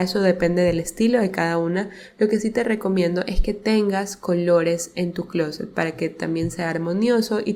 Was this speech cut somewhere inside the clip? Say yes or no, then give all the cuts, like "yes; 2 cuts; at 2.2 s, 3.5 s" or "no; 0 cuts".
no; 0 cuts